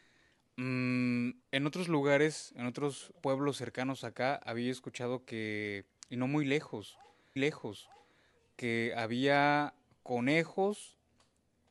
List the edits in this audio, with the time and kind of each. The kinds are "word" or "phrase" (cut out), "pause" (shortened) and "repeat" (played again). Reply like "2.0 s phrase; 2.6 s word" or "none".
1.4 s pause; 3.2 s pause; 6.0 s pause; 7.4 s repeat